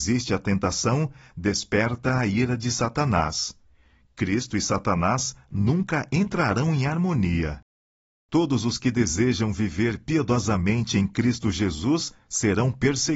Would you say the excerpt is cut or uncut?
uncut